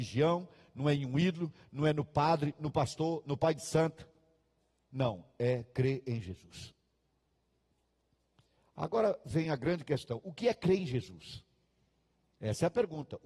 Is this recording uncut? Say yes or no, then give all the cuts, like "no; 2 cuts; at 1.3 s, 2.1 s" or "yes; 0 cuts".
yes; 0 cuts